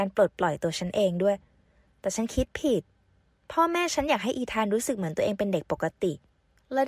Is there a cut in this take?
no; 0 cuts

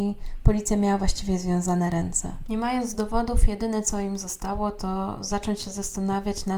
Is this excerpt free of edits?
yes; 0 cuts

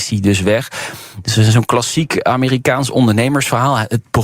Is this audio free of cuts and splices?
yes; 0 cuts

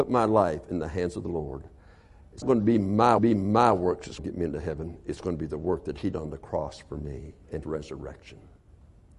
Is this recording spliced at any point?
yes; 5 cuts; at 2.4 s, 3.2 s, 4.2 s, 6.1 s, 7.6 s

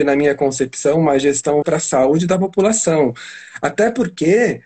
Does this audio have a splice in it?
yes; 1 cut; at 1.6 s

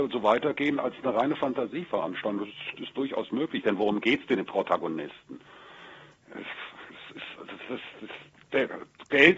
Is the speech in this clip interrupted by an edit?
no; 0 cuts

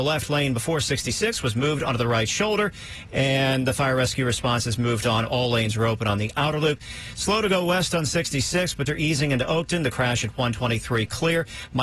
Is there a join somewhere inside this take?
yes; 1 cut; at 8.9 s

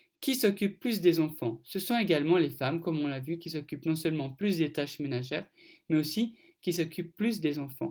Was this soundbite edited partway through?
no; 0 cuts

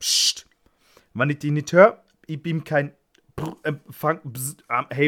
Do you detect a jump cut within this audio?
no; 0 cuts

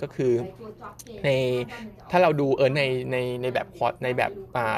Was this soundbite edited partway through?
yes; 1 cut; at 2.7 s

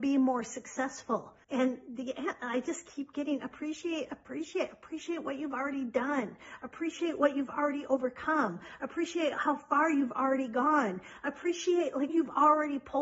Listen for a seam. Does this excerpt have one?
yes; 2 cuts; at 1.4 s, 12.1 s

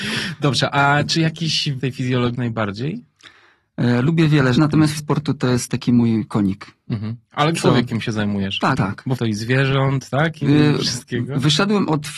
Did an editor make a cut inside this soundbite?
yes; 9 cuts; at 1.8 s, 2.3 s, 4.6 s, 5.0 s, 5.7 s, 7.5 s, 8.7 s, 9.2 s, 10.4 s

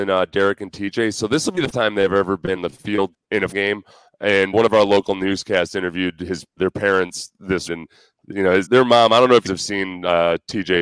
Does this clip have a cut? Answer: yes; 9 cuts; at 1.7 s, 2.6 s, 3.1 s, 3.5 s, 4.5 s, 6.6 s, 7.7 s, 8.7 s, 9.5 s

